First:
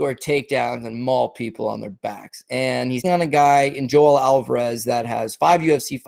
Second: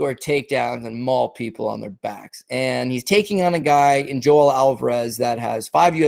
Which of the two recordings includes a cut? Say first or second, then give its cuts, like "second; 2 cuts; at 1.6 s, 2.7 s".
first; 1 cut; at 3.0 s